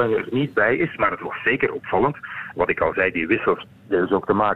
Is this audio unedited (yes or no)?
yes